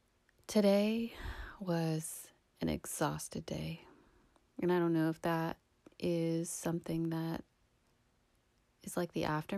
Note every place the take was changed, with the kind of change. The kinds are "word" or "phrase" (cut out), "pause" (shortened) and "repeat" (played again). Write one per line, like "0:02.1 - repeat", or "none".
none